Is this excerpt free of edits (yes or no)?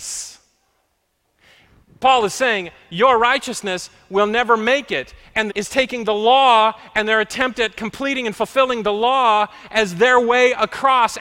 no